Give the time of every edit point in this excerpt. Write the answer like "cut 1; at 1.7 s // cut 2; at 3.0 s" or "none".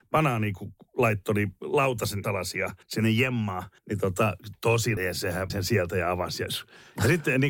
cut 1; at 2.2 s // cut 2; at 2.8 s // cut 3; at 3.8 s // cut 4; at 5.0 s // cut 5; at 5.5 s